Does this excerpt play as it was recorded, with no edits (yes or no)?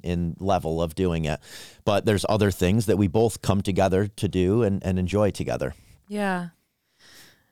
yes